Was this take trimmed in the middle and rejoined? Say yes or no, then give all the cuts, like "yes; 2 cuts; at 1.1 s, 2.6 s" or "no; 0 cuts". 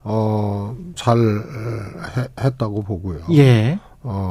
yes; 1 cut; at 1.0 s